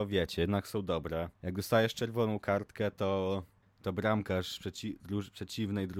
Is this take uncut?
no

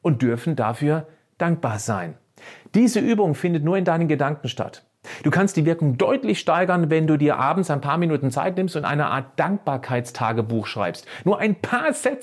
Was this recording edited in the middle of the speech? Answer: no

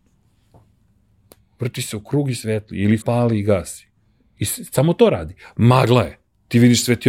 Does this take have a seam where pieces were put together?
yes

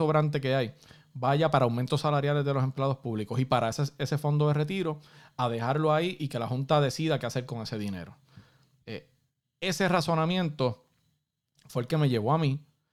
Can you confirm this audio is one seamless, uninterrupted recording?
yes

